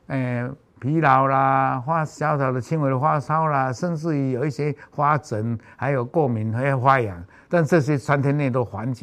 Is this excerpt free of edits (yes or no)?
yes